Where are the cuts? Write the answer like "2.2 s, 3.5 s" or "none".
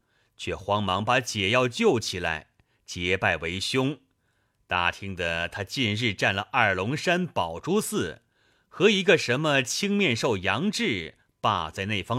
none